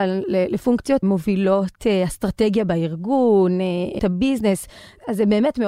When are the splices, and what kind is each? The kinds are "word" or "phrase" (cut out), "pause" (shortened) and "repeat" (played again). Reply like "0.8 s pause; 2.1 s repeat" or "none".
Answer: 1.0 s word; 4.0 s word